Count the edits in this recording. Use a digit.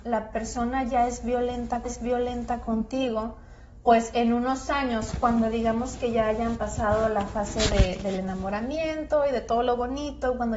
1